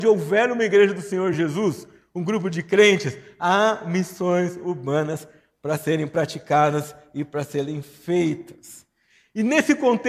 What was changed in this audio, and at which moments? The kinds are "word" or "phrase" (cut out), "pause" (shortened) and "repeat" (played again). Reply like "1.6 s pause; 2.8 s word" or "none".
none